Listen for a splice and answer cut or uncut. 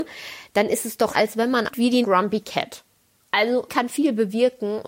cut